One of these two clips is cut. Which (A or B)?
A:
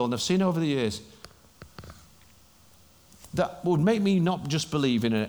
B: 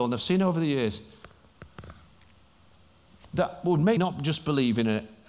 B